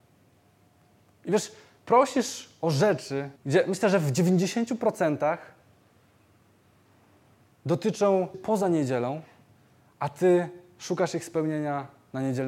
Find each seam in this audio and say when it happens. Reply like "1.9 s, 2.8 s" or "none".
3.4 s, 8.3 s